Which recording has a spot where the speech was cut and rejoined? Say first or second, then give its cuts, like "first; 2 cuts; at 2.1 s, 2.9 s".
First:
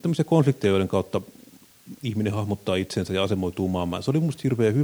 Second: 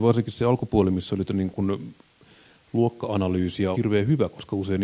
second; 2 cuts; at 1.3 s, 3.7 s